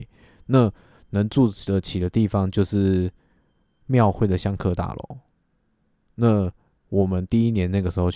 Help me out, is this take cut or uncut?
uncut